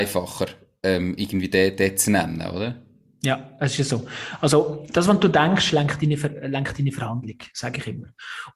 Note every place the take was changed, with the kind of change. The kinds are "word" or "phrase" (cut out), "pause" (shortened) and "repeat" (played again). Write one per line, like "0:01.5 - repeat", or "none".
none